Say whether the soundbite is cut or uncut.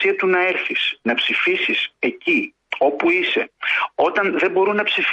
uncut